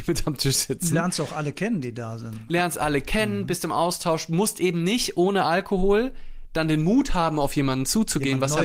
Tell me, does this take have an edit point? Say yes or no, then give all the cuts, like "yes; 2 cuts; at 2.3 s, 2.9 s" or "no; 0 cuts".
no; 0 cuts